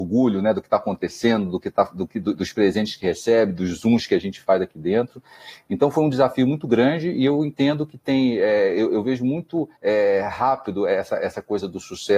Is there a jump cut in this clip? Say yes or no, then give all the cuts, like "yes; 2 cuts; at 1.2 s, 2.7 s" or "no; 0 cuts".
yes; 1 cut; at 9.8 s